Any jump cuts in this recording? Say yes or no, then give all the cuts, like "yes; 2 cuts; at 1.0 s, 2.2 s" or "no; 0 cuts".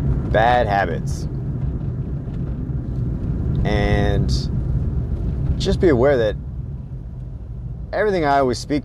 no; 0 cuts